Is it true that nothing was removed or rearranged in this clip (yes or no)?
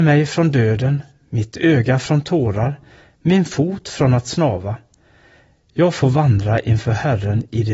yes